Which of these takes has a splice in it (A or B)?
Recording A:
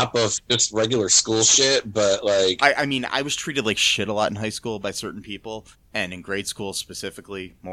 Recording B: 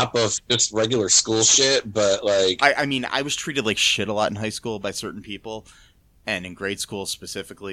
A